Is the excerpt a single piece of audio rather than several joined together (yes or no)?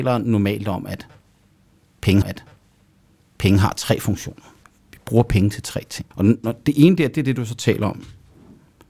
no